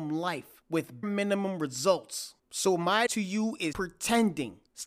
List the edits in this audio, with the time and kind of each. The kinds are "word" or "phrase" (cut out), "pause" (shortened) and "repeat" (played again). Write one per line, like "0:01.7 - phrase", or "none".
0:01.0 - word
0:03.1 - word
0:03.7 - word

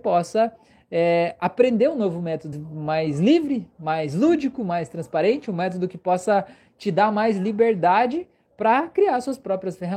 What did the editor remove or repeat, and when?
0:02.5 - word

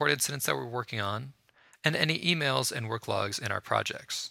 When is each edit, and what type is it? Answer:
none

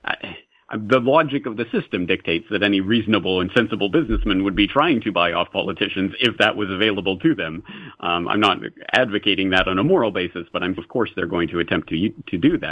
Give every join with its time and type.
0:10.8 - word

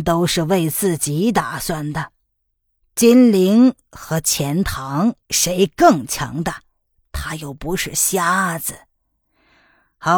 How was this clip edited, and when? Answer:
0:02.3 - pause
0:05.2 - pause

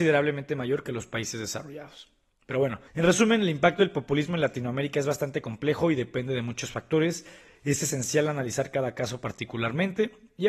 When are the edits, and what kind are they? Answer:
0:02.9 - pause

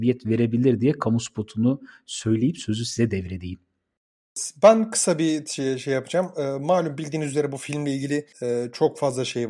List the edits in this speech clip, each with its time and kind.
0:08.3 - pause

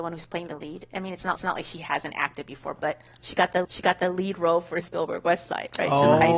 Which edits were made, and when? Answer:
0:01.4 - repeat
0:03.6 - repeat
0:04.8 - word

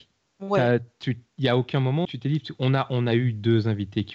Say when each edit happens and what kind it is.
0:02.0 - word

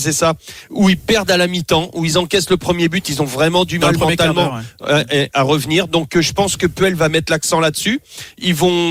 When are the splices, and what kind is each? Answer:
none

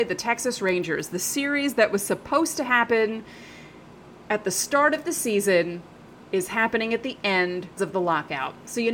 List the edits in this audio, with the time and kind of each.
0:07.8 - word

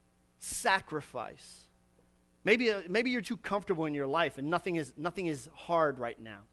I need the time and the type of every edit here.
0:03.2 - word

